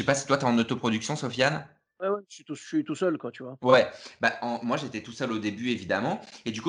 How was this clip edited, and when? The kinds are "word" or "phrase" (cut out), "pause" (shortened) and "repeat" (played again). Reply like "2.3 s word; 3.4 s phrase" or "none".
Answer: none